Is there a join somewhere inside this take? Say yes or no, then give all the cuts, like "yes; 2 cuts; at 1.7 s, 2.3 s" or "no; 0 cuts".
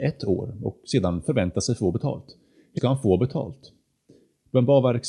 yes; 1 cut; at 2.8 s